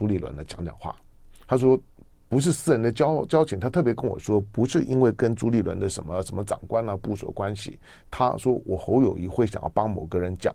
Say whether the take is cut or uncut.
uncut